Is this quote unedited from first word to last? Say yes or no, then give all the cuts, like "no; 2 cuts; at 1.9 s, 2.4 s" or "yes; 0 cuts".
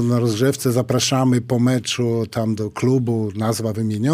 yes; 0 cuts